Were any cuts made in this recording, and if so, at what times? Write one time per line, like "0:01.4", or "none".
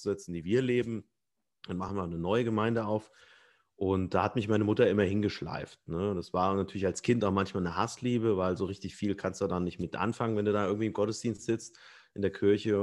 none